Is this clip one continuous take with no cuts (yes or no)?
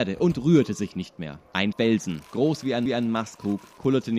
no